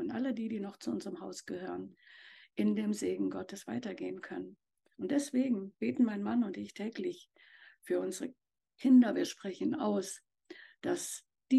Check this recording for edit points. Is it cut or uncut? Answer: uncut